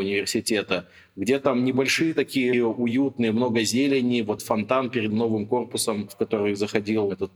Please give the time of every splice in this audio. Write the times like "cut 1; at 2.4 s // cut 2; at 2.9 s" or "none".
cut 1; at 2.5 s // cut 2; at 4.4 s // cut 3; at 5.1 s